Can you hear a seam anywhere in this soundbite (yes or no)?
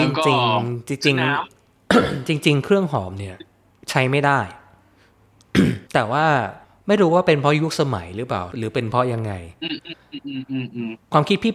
yes